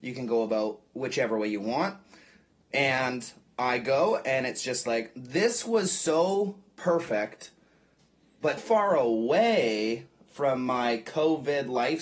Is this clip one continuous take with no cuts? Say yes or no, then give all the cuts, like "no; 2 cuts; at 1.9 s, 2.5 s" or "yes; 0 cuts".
no; 1 cut; at 8.6 s